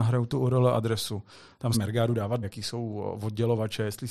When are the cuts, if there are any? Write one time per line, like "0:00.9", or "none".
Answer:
0:01.7
0:02.4